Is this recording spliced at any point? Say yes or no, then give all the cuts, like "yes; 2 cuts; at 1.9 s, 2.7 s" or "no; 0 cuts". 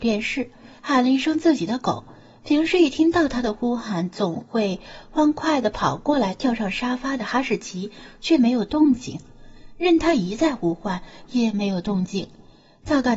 no; 0 cuts